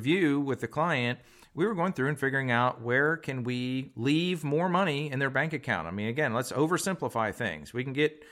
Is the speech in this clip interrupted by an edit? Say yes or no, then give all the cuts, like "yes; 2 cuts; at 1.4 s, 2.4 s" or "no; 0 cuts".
no; 0 cuts